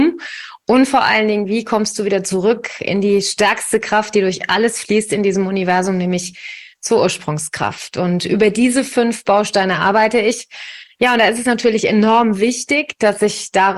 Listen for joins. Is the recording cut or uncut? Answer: uncut